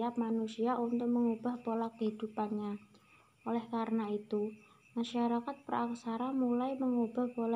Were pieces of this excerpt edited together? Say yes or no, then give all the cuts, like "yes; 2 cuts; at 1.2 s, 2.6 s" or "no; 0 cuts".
no; 0 cuts